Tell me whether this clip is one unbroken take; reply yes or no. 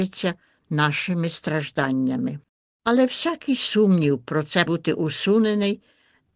no